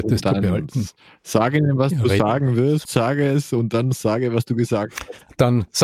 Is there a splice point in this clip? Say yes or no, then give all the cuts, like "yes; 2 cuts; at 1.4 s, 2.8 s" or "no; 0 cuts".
no; 0 cuts